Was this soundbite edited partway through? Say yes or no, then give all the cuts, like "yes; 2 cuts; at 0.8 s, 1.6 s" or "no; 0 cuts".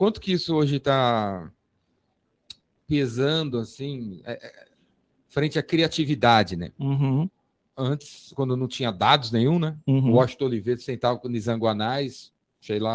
no; 0 cuts